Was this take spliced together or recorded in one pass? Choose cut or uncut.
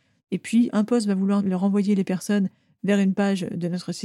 uncut